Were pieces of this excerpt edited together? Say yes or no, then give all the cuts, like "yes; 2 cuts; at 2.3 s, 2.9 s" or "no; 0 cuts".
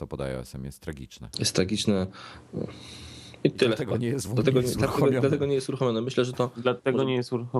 no; 0 cuts